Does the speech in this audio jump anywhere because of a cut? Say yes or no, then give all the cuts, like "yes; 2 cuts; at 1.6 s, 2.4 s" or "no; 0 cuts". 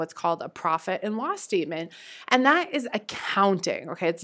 no; 0 cuts